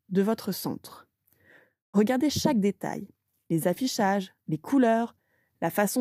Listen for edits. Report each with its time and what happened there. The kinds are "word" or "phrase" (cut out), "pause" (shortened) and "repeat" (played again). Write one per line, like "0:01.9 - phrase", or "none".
none

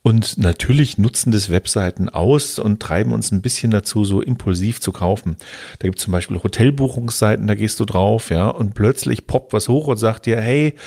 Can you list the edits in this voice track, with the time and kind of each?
none

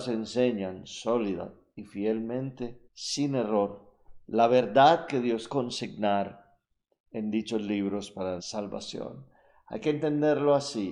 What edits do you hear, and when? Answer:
0:02.9 - pause
0:05.5 - word
0:08.4 - word

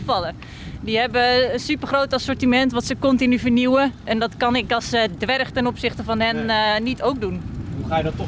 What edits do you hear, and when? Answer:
none

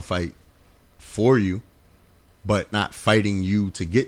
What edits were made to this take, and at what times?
0:02.7 - word

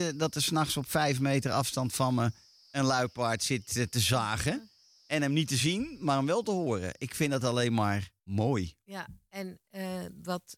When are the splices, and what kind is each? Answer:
0:08.2 - pause

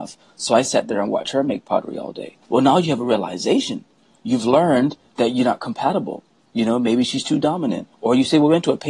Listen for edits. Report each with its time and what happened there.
0:02.4 - pause
0:07.9 - pause

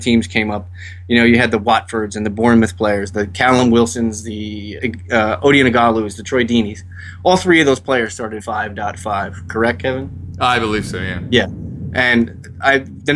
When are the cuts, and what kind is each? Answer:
0:04.8 - word
0:08.4 - word

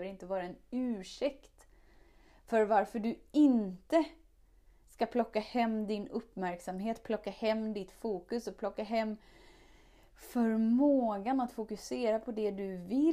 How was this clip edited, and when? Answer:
none

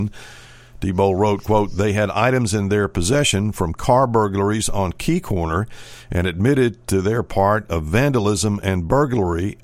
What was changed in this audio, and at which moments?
none

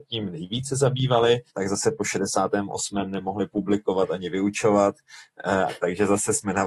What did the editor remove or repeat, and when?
0:01.5 - pause

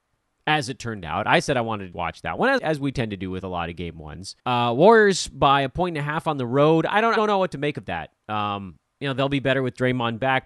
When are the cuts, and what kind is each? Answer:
0:01.9 - word
0:02.6 - word
0:04.4 - pause
0:07.2 - word

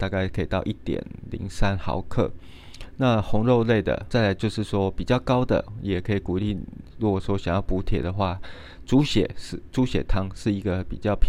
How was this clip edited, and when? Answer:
0:04.1 - word

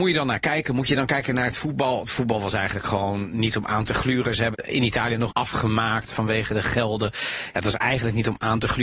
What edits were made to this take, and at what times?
0:04.5 - word
0:05.3 - phrase

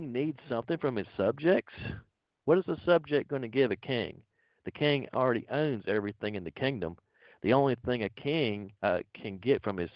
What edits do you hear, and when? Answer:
none

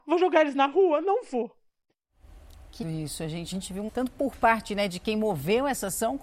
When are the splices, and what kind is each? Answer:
0:02.8 - word
0:03.5 - word
0:03.9 - word

